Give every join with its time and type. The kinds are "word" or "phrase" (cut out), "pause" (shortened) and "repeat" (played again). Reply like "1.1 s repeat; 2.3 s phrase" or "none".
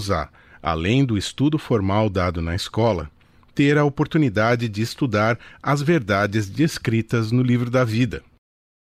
none